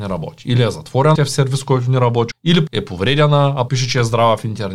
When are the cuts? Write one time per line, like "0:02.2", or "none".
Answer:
0:01.1
0:02.3
0:02.7
0:03.7